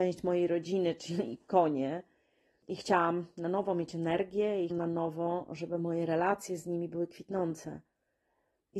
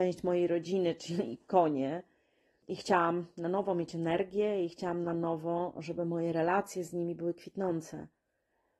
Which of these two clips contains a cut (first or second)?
first